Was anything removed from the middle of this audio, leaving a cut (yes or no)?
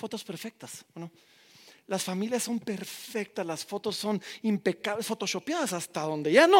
no